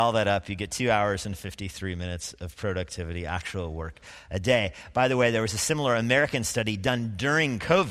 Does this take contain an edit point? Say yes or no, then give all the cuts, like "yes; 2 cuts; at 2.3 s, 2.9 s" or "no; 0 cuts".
no; 0 cuts